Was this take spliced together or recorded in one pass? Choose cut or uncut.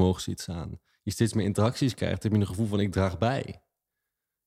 uncut